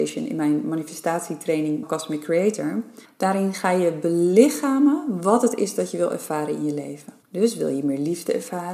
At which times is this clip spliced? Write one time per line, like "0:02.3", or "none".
0:01.8
0:03.0
0:07.2